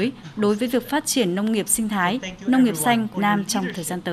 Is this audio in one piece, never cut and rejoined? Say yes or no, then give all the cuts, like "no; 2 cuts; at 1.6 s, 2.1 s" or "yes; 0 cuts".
no; 1 cut; at 3.1 s